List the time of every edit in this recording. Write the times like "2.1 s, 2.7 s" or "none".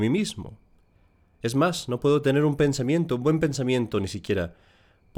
none